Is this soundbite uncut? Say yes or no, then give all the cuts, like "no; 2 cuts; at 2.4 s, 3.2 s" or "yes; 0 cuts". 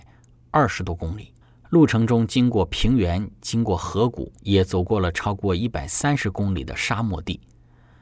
no; 2 cuts; at 1.4 s, 4.4 s